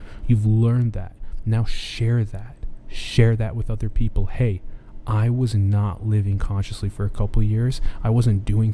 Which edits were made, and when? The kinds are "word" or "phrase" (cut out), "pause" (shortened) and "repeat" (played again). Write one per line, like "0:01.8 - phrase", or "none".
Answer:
none

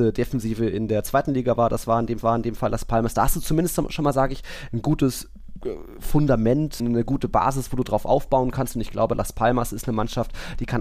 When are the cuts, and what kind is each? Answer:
0:02.2 - repeat
0:06.8 - word

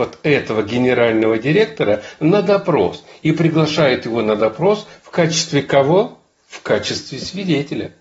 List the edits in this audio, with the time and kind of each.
none

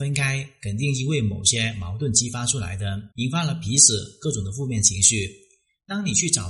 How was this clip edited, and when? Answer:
0:03.1 - pause

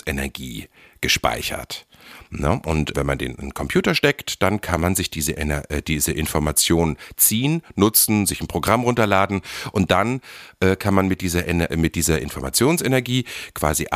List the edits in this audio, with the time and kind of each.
0:02.9 - word

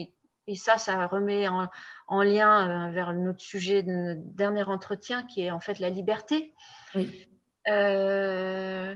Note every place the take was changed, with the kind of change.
none

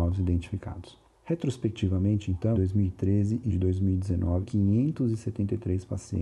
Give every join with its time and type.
0:01.1 - pause
0:02.5 - phrase
0:03.5 - word
0:04.4 - phrase

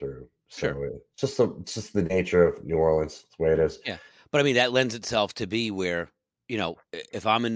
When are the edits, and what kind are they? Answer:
none

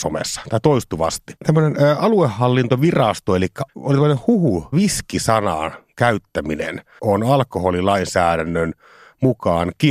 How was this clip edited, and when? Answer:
0:01.4 - pause
0:03.7 - word
0:04.7 - phrase
0:07.0 - word

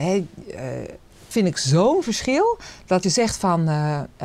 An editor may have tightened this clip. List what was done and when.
0:01.3 - word
0:03.0 - word

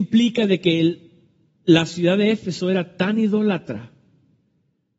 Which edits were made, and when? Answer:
none

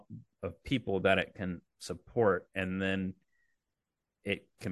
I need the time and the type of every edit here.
none

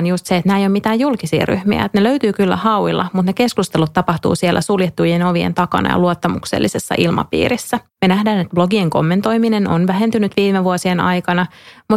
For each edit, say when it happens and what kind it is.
0:07.9 - pause

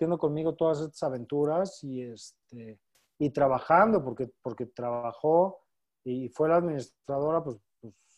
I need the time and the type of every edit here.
none

